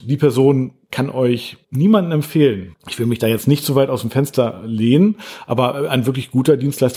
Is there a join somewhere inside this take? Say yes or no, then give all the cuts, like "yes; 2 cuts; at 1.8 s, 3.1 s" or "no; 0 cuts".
yes; 2 cuts; at 1.6 s, 2.8 s